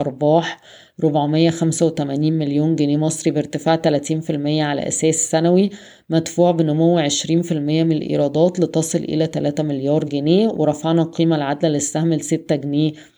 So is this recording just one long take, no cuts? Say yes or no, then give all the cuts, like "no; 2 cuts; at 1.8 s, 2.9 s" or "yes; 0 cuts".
yes; 0 cuts